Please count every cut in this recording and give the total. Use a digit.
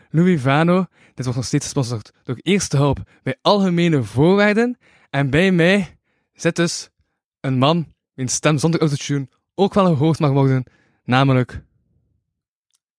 0